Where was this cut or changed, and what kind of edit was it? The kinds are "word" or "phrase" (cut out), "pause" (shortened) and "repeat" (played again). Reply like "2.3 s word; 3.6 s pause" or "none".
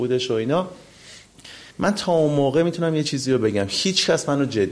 1.7 s pause